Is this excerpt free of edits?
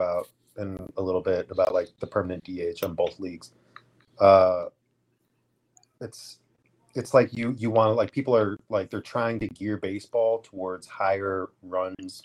yes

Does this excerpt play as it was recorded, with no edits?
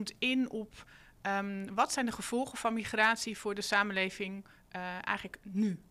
yes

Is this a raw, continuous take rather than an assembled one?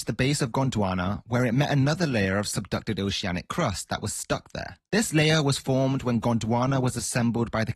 no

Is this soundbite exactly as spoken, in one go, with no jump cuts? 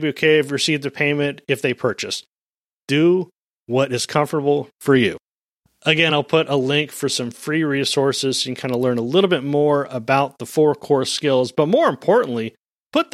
yes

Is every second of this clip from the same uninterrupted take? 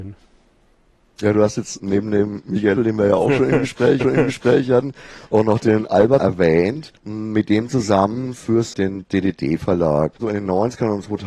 no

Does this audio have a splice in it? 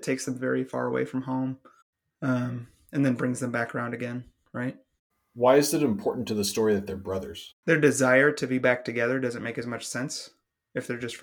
no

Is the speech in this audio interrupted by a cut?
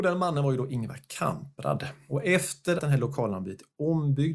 yes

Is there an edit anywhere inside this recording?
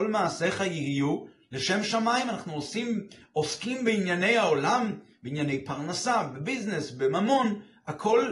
no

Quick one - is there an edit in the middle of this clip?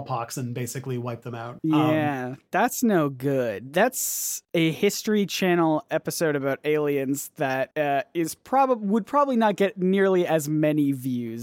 no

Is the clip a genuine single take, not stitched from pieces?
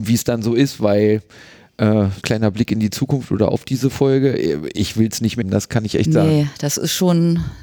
no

